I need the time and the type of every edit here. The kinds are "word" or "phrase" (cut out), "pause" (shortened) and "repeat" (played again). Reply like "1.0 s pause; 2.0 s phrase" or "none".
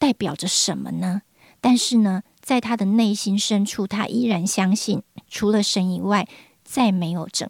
5.2 s pause